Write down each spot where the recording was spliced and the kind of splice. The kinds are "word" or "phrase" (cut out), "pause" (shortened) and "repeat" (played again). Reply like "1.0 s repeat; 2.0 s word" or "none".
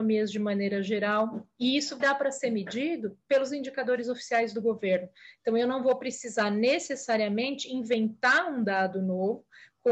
2.0 s word